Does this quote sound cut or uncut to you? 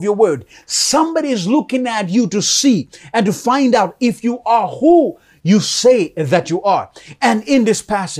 uncut